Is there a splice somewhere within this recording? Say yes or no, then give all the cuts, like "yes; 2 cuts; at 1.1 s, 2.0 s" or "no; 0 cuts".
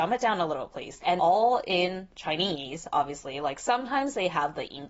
yes; 1 cut; at 1.2 s